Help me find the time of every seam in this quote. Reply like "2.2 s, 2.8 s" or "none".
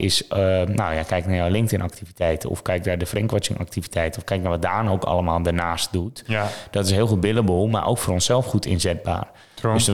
none